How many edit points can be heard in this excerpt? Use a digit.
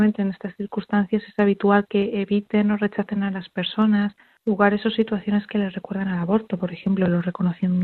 0